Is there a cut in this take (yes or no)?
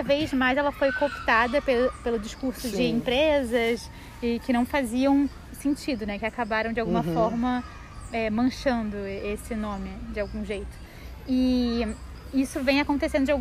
yes